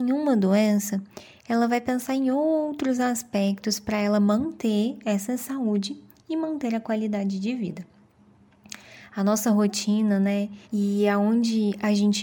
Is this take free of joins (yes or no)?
no